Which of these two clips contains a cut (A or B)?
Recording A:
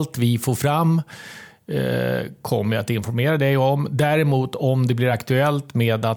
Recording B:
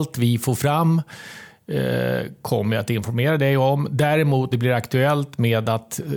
B